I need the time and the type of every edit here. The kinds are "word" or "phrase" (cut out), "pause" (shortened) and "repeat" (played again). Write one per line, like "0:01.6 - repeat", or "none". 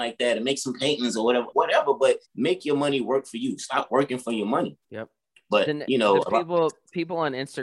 0:01.5 - word
0:02.2 - pause
0:04.8 - pause